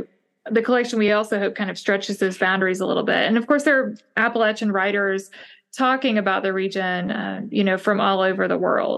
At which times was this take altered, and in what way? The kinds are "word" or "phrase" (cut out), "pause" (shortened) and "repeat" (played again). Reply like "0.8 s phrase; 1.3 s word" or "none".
none